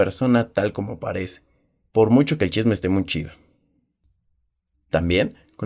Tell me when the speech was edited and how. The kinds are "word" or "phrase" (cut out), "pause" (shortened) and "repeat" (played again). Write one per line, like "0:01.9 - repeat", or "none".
none